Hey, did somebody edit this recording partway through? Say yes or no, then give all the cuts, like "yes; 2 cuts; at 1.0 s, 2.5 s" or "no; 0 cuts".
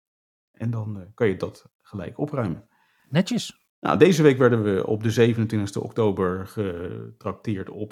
yes; 1 cut; at 3.7 s